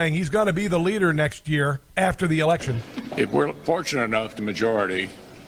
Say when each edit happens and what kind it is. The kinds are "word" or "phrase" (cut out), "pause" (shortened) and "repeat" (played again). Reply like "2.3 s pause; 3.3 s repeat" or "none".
1.9 s pause; 4.4 s phrase